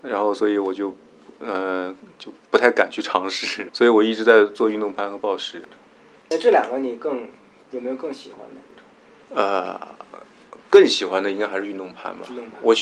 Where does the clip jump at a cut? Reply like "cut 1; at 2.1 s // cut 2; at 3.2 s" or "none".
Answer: cut 1; at 3.7 s